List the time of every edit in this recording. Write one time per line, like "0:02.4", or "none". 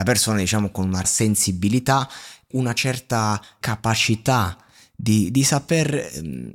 0:01.0
0:02.5
0:03.6